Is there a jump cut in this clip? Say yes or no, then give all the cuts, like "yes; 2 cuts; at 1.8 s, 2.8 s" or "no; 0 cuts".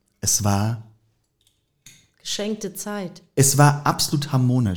no; 0 cuts